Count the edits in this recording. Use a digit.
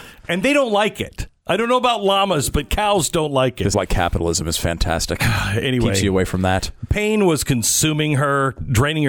1